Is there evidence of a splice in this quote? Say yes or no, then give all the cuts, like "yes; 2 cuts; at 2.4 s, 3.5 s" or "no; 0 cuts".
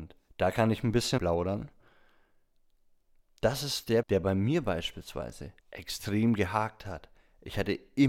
yes; 3 cuts; at 1.2 s, 4.0 s, 5.6 s